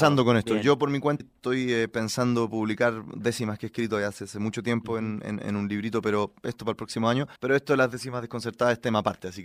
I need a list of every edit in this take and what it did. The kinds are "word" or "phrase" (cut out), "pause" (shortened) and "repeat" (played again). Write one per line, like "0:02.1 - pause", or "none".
0:01.2 - word
0:07.4 - pause